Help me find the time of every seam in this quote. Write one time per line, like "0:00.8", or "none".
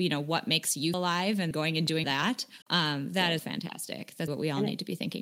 0:00.9
0:01.5
0:02.0
0:02.6
0:03.4
0:04.3